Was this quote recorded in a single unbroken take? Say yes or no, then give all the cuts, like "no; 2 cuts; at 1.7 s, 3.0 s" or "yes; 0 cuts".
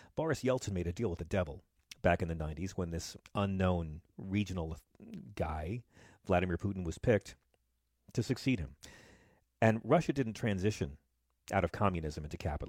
yes; 0 cuts